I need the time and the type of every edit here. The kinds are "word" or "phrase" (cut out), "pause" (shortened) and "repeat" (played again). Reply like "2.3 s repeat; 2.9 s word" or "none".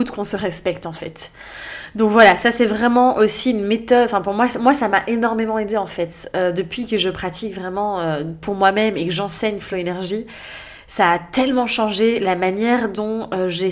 none